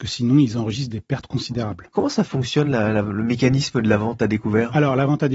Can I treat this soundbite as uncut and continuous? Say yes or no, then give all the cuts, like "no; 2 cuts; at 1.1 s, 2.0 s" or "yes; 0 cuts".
yes; 0 cuts